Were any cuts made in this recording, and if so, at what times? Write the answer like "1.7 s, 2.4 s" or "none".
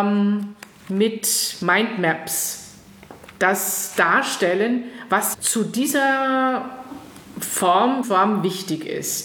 5.3 s, 8.0 s